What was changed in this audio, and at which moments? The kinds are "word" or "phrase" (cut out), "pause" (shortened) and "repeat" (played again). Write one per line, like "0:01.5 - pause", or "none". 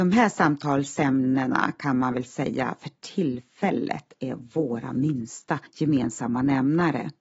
0:05.7 - pause